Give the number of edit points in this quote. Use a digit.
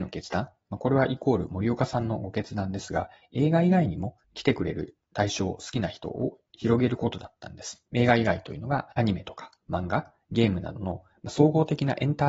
3